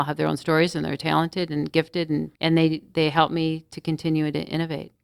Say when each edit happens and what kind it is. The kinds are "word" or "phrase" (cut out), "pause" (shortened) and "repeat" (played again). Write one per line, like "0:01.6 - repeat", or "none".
0:02.3 - pause